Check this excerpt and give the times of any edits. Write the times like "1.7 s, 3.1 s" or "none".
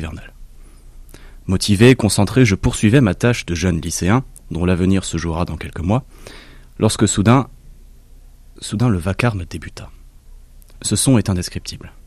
none